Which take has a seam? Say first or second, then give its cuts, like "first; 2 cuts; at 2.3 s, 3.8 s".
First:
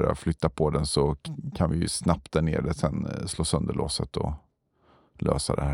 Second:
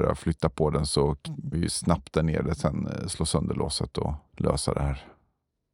second; 2 cuts; at 1.5 s, 4.3 s